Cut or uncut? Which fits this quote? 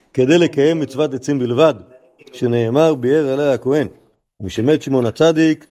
uncut